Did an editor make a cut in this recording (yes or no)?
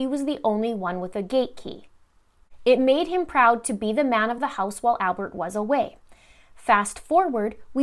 no